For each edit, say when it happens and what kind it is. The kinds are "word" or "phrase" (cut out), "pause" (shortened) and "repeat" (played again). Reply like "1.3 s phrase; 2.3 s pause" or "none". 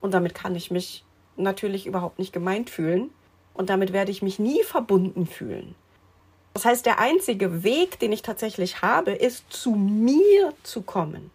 none